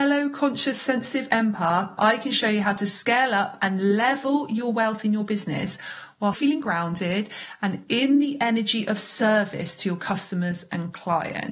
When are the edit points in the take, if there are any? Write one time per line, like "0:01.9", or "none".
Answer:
0:06.3